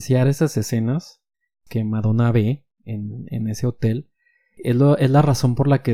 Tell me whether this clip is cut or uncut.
uncut